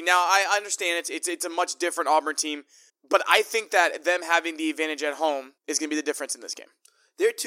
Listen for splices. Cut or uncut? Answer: cut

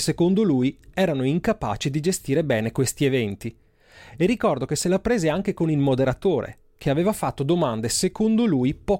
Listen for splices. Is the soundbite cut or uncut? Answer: uncut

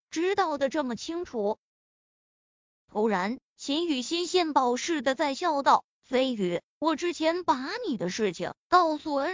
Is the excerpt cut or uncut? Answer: uncut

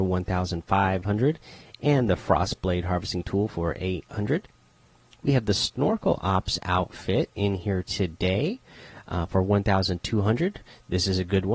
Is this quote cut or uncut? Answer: uncut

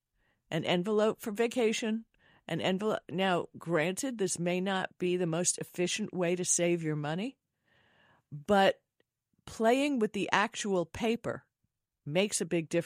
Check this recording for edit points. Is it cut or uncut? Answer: uncut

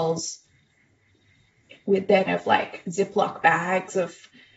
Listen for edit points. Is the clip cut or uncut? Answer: cut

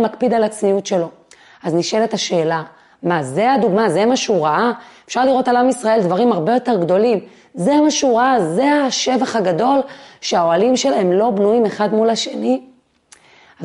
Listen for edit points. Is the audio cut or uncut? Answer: uncut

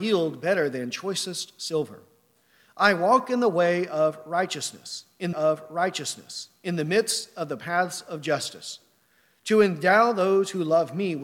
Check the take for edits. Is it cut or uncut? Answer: cut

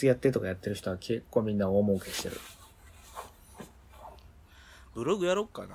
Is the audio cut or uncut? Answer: uncut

